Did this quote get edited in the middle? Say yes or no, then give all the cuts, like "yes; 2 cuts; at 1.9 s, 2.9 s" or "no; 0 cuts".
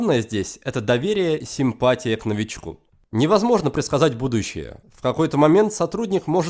yes; 2 cuts; at 1.4 s, 2.9 s